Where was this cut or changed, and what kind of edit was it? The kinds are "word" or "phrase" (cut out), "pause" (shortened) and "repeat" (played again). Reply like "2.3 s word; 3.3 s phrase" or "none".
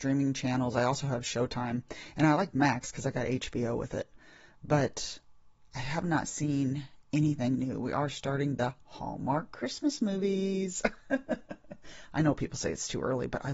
none